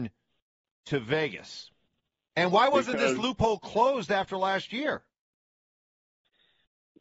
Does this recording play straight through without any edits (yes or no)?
yes